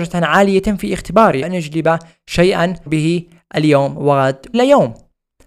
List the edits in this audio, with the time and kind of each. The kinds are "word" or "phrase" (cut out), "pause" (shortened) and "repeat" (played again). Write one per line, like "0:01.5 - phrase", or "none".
0:01.4 - word
0:02.9 - word
0:04.5 - word

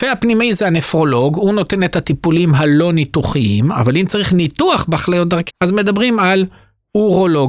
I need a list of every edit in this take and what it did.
0:05.5 - word

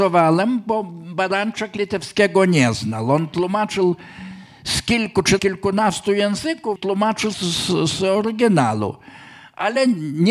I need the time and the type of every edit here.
0:05.4 - word
0:06.8 - word
0:07.3 - word

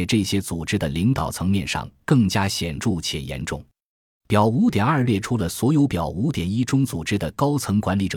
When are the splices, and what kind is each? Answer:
none

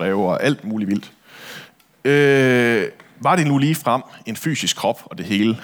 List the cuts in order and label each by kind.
none

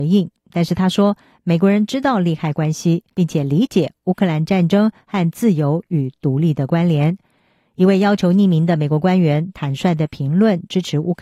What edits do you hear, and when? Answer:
0:03.1 - pause

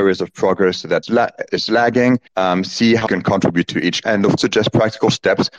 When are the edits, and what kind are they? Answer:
0:01.0 - word
0:01.5 - phrase
0:02.3 - pause
0:03.1 - word
0:04.0 - word
0:04.4 - word

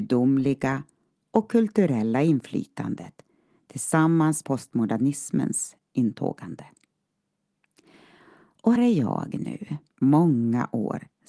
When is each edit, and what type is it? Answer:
0:04.4 - word
0:08.8 - word

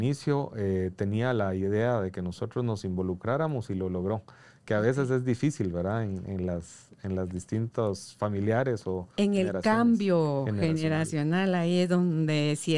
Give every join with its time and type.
none

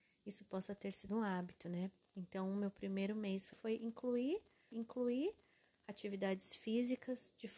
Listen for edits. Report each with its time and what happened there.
0:01.1 - word
0:03.5 - word
0:04.7 - repeat

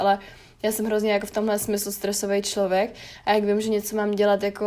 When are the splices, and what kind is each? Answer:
none

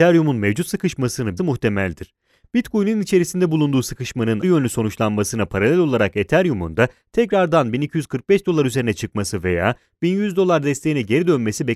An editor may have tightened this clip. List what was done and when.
0:01.4 - phrase
0:04.4 - phrase

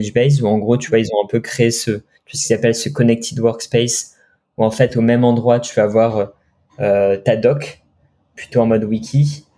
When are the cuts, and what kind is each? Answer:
none

